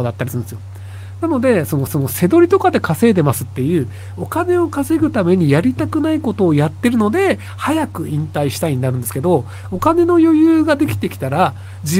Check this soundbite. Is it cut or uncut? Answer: cut